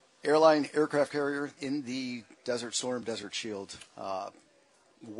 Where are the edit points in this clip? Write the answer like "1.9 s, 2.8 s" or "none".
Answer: 1.6 s